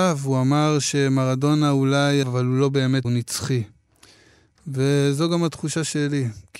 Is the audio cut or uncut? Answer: cut